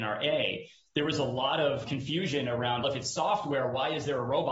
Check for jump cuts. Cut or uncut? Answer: cut